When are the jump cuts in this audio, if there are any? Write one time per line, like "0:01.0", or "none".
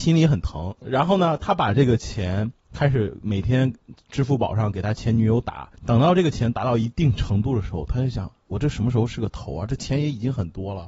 0:05.8